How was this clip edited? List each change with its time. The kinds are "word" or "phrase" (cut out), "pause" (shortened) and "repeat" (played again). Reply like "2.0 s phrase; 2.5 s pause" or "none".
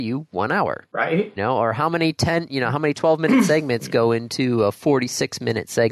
1.4 s word